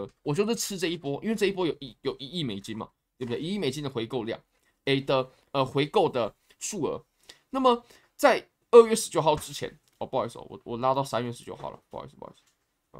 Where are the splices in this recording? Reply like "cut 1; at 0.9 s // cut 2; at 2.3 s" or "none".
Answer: none